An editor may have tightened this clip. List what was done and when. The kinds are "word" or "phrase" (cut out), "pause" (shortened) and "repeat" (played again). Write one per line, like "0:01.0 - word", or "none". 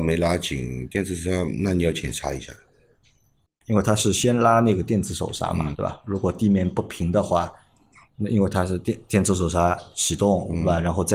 0:05.7 - word